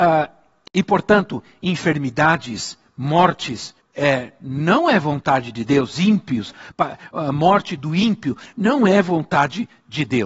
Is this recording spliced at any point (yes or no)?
yes